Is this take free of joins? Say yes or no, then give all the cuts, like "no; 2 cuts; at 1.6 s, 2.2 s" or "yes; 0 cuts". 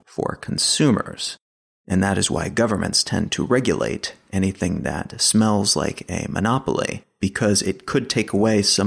yes; 0 cuts